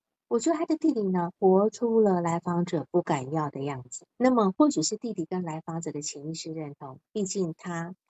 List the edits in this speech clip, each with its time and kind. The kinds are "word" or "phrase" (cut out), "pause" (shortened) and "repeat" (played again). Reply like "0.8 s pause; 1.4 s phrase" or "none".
1.3 s pause; 4.1 s pause